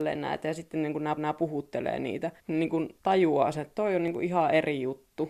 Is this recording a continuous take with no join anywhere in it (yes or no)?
no